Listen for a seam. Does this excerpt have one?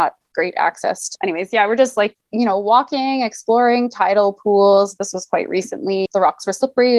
yes; 1 cut; at 6.1 s

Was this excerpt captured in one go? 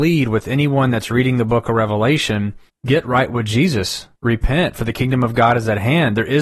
no; 2 cuts; at 2.7 s, 4.2 s

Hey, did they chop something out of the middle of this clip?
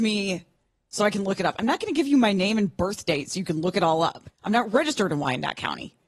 yes; 1 cut; at 4.3 s

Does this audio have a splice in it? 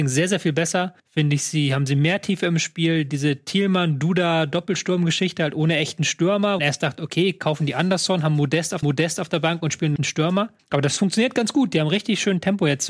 yes; 5 cuts; at 1.0 s, 6.6 s, 8.8 s, 10.0 s, 10.6 s

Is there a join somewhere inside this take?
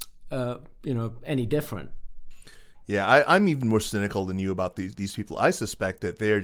no; 0 cuts

